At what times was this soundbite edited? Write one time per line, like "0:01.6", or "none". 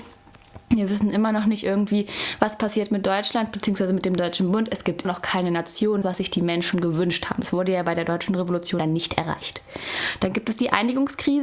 0:05.0
0:06.0
0:08.8